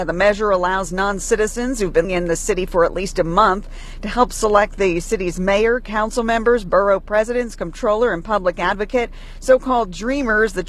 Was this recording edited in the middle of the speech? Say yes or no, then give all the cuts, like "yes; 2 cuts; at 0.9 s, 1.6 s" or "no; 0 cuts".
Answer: yes; 1 cut; at 2.0 s